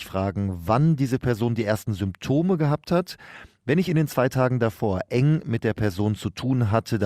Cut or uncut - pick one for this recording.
uncut